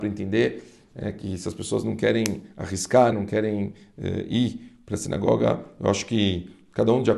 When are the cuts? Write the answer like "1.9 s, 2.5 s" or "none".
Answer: 3.1 s